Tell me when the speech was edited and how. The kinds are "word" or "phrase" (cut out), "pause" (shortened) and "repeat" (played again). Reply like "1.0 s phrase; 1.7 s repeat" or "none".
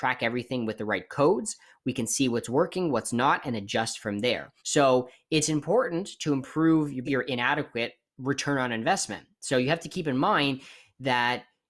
4.6 s pause; 7.0 s word